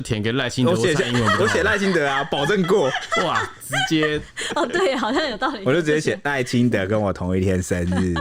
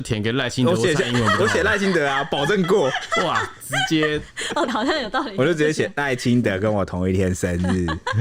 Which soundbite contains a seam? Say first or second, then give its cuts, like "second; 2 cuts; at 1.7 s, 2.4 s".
second; 1 cut; at 4.7 s